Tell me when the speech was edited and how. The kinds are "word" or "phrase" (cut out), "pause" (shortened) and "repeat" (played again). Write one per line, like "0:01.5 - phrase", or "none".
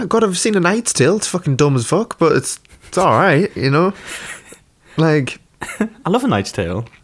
none